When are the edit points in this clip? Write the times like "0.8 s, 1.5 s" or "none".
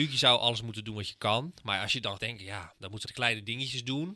2.2 s, 3.0 s